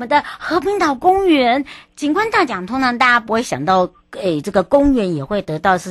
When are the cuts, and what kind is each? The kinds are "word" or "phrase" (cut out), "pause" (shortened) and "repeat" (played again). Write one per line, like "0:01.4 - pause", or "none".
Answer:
none